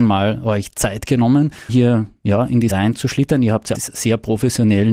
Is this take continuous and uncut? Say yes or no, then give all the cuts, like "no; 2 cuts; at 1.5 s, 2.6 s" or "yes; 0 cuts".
no; 3 cuts; at 1.7 s, 2.7 s, 3.7 s